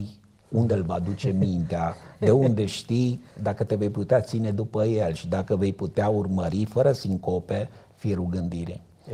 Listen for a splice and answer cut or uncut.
uncut